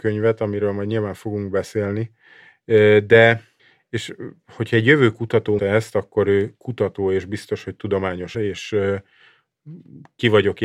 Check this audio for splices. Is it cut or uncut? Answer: cut